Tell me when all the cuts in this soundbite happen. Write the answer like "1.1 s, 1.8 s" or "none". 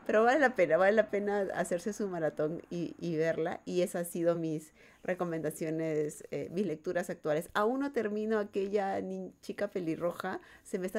none